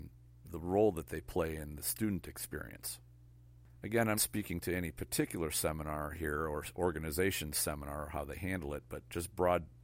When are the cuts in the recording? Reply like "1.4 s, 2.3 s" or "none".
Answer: 4.2 s

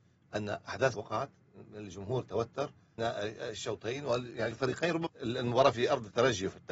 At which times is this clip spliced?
0.9 s, 3.0 s, 4.5 s, 5.1 s

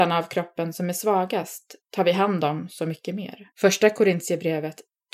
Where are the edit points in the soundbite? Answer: 1.8 s, 3.5 s

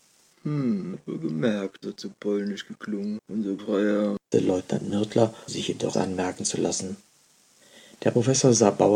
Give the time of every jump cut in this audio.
0.9 s, 1.8 s, 3.2 s, 3.6 s, 4.3 s, 5.5 s, 5.9 s

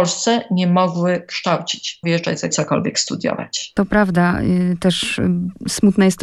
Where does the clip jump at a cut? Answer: 2.0 s, 2.5 s

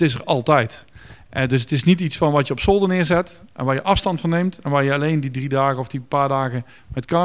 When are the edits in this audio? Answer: none

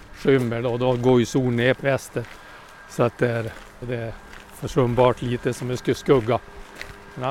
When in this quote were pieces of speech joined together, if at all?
1.7 s, 3.8 s

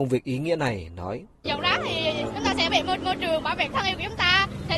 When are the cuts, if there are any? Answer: 1.3 s, 2.7 s, 3.0 s, 3.7 s

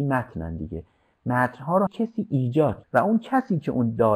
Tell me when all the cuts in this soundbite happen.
1.9 s, 2.8 s

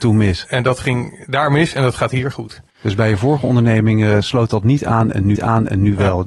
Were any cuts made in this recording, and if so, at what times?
2.7 s, 5.4 s

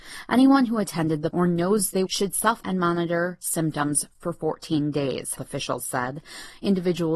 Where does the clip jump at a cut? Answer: 1.3 s, 2.1 s, 2.6 s, 5.4 s

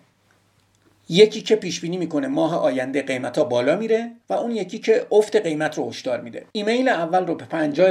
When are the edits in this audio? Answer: 4.2 s, 6.5 s

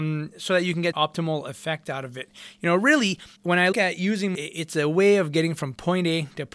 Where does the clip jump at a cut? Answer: 0.9 s, 3.4 s, 3.7 s, 4.3 s

